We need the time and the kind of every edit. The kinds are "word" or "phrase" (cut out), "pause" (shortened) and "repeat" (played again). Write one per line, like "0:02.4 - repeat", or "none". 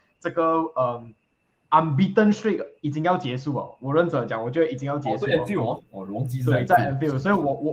none